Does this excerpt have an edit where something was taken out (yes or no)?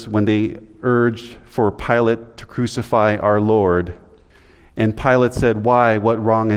no